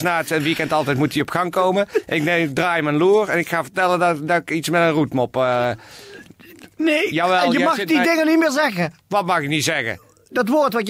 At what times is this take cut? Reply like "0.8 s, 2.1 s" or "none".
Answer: 6.7 s